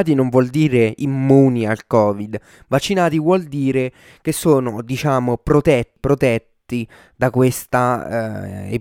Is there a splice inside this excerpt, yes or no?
no